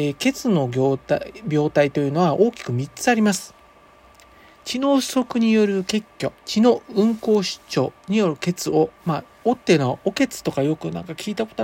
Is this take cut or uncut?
cut